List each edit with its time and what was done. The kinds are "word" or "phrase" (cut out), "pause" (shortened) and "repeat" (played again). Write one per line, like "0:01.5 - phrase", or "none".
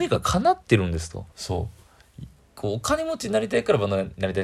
0:01.3 - pause